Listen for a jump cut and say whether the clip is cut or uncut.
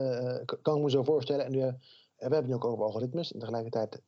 uncut